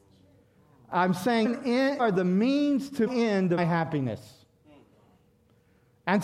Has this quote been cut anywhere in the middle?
yes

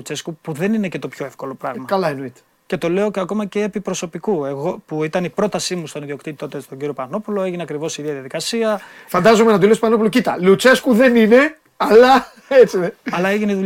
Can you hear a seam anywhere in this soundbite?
no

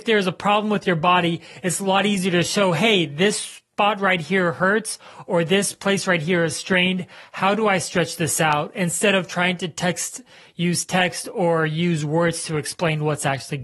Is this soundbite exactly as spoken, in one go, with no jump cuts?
yes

